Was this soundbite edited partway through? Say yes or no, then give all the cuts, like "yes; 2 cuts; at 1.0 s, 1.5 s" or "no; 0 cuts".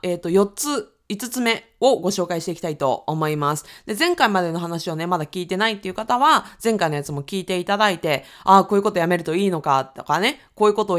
no; 0 cuts